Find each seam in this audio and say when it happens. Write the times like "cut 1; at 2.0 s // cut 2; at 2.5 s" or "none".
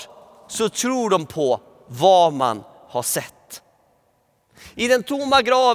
none